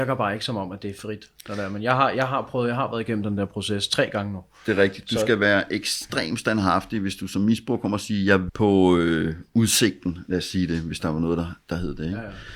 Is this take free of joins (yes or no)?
no